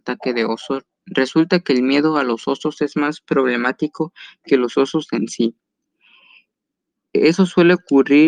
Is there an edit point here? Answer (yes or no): no